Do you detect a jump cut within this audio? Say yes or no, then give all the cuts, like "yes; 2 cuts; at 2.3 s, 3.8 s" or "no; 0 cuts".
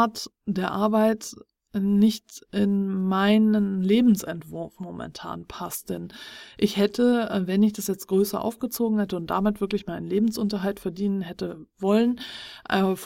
no; 0 cuts